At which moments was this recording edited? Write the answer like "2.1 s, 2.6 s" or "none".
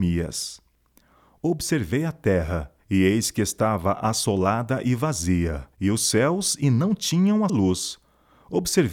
2.8 s, 5.7 s, 7.5 s